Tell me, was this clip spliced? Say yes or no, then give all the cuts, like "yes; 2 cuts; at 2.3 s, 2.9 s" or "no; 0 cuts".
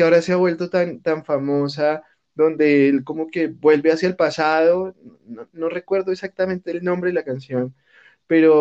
no; 0 cuts